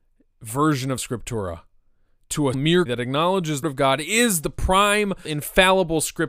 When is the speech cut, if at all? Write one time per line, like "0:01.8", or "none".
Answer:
0:01.0
0:02.5
0:02.9
0:03.6
0:05.2

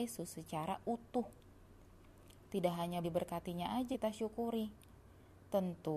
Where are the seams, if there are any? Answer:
0:03.0
0:03.9

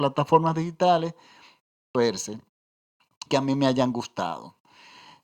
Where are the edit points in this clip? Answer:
0:01.9
0:03.3

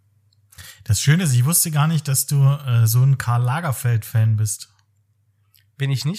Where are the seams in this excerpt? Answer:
none

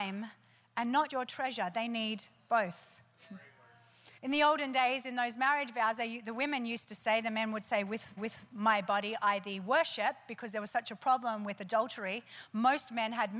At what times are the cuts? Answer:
0:01.1
0:04.2
0:08.2

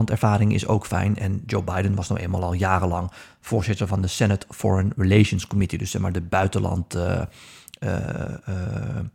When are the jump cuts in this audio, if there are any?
none

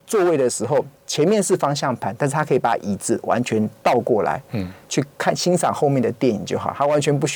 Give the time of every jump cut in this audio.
0:01.0

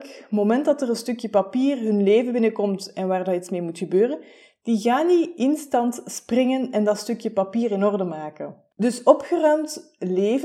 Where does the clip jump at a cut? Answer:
0:08.7

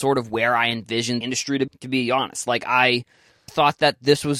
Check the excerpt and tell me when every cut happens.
0:01.2
0:01.7
0:03.5

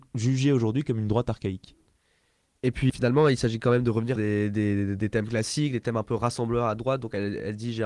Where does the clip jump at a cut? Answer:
0:02.9
0:04.2

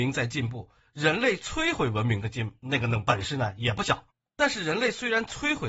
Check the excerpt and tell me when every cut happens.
0:04.1

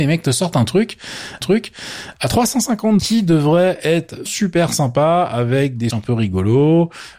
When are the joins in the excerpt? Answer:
0:01.4
0:03.0
0:04.3
0:05.9

